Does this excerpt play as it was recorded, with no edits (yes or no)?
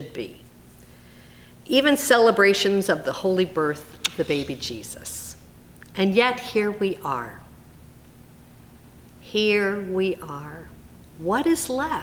yes